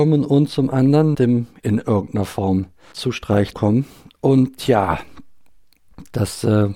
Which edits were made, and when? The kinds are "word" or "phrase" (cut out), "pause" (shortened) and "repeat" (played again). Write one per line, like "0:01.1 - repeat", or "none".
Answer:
0:01.1 - word
0:01.6 - word
0:02.9 - word
0:03.5 - word